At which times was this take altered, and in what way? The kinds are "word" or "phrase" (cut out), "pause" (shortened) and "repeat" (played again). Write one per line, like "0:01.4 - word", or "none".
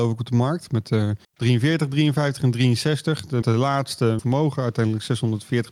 0:01.2 - pause
0:03.4 - word
0:04.2 - phrase